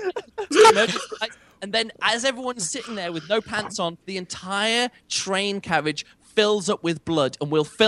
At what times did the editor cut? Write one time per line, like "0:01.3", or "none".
0:04.0

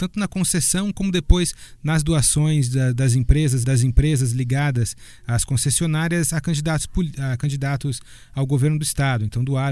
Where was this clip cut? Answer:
0:03.6

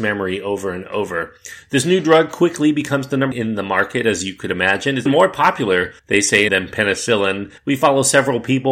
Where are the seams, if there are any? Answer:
0:03.3
0:05.1
0:06.0
0:06.5
0:07.6

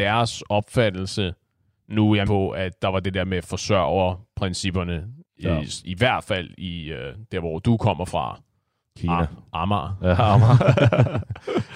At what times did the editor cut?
0:02.2

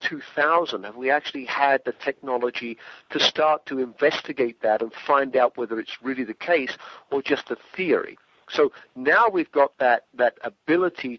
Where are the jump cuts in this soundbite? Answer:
none

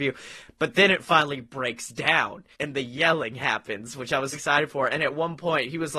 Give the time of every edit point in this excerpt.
0:02.5
0:04.3

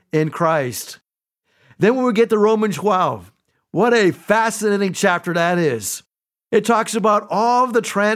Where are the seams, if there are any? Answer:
0:02.7

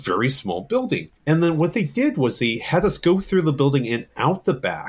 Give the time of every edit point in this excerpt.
0:01.2

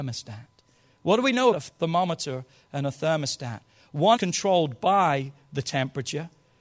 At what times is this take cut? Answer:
0:01.5
0:04.2

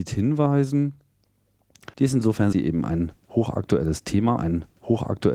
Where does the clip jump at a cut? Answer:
0:01.9
0:02.5
0:04.4

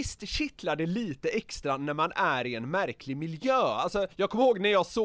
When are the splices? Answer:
0:04.1

